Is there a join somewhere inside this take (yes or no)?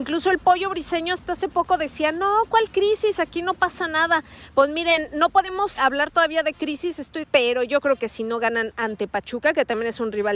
yes